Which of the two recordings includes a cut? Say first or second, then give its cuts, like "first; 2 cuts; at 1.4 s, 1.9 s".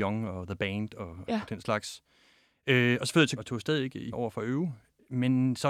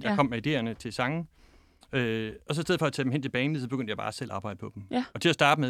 first; 3 cuts; at 1.3 s, 3.4 s, 4.1 s